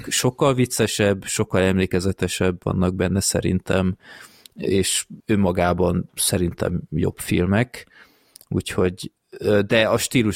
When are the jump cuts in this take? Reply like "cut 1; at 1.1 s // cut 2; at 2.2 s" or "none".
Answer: cut 1; at 2.6 s // cut 2; at 5.2 s